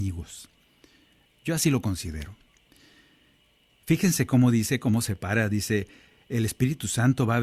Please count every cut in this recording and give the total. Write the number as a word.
zero